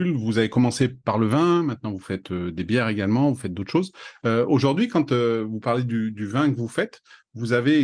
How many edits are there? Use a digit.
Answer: 0